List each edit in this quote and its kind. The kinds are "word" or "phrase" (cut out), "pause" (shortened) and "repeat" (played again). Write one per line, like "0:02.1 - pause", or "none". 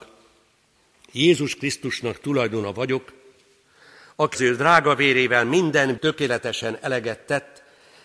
0:04.3 - word
0:06.0 - word